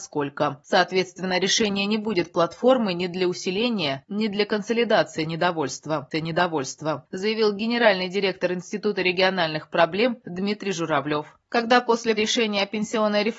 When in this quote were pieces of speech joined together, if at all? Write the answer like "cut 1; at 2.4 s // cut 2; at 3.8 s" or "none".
cut 1; at 6.1 s // cut 2; at 12.2 s

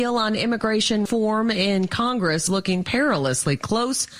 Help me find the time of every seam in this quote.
cut 1; at 1.1 s // cut 2; at 2.5 s

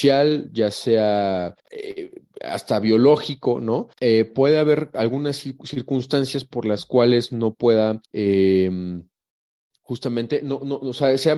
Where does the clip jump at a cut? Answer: cut 1; at 1.6 s // cut 2; at 3.9 s // cut 3; at 8.0 s

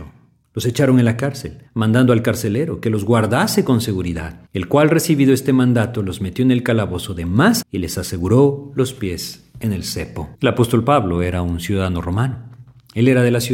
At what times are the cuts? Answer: cut 1; at 1.7 s // cut 2; at 4.5 s // cut 3; at 7.6 s // cut 4; at 10.3 s

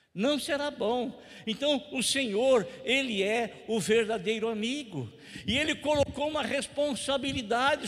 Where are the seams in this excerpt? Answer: none

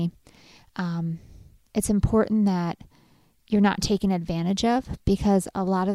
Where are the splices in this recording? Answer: none

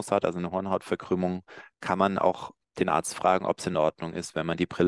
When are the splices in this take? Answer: none

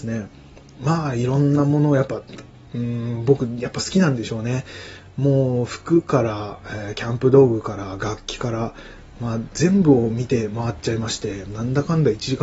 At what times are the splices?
none

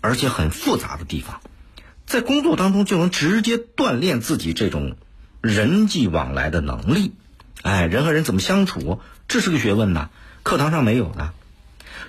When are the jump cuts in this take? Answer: none

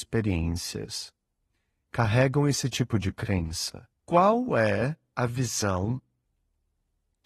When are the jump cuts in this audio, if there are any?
cut 1; at 4.0 s

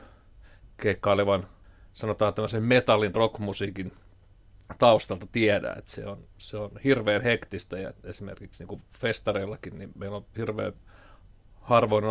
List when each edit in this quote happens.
cut 1; at 1.6 s // cut 2; at 3.1 s

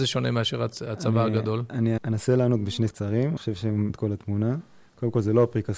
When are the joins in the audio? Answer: cut 1; at 2.0 s // cut 2; at 2.9 s // cut 3; at 3.4 s // cut 4; at 3.9 s

